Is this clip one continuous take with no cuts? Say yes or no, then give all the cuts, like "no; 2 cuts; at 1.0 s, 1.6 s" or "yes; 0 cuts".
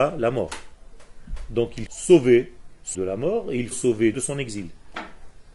no; 4 cuts; at 1.9 s, 2.9 s, 3.7 s, 4.1 s